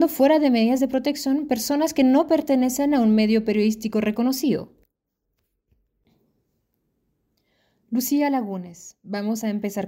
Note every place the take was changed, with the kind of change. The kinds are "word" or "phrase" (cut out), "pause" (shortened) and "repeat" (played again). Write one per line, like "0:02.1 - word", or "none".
none

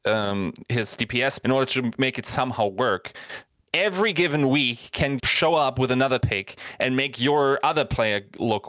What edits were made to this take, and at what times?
0:01.4 - word
0:03.7 - word
0:05.2 - word
0:06.2 - word

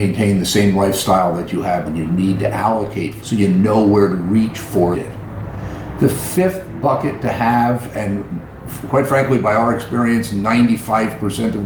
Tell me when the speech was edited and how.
0:01.8 - word
0:03.2 - word
0:04.9 - phrase

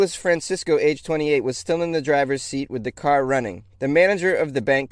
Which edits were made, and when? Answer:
0:03.7 - pause

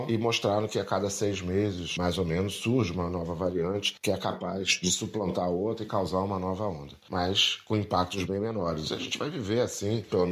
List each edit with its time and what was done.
none

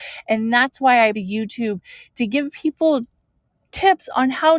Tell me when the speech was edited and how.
0:01.1 - word

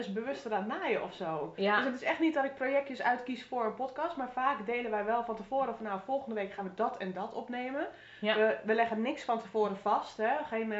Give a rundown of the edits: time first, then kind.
none

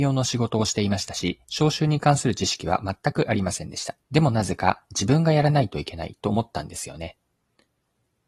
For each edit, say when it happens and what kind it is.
0:01.4 - pause
0:04.0 - pause

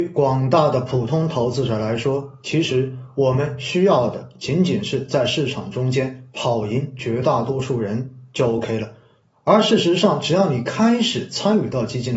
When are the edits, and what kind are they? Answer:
none

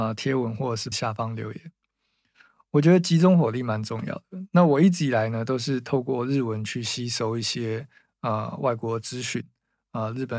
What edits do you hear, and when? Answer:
0:00.9 - word

